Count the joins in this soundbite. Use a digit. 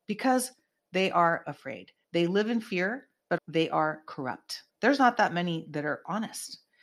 2